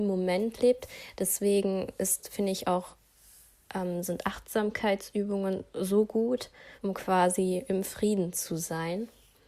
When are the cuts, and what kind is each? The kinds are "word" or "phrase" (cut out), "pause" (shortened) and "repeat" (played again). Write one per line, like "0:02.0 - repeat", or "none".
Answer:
0:06.8 - pause